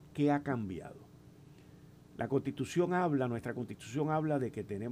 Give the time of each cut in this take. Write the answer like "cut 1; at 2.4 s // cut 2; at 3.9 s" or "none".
none